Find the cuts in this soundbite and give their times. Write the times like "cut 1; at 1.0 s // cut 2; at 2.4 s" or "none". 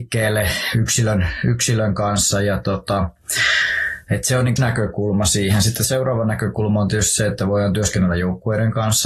cut 1; at 4.6 s